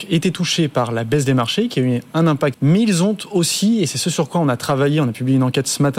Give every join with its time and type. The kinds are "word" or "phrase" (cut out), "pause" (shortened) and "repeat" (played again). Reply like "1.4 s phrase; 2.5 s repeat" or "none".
2.5 s phrase